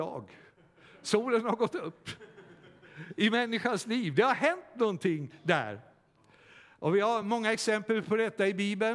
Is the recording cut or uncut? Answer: uncut